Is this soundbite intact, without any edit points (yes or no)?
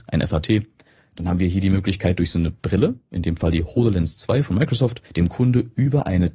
no